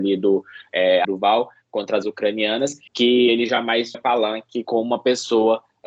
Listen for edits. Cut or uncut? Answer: cut